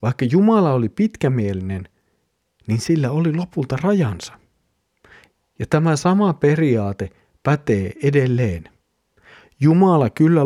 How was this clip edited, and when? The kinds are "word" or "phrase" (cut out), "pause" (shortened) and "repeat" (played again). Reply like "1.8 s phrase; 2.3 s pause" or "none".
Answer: none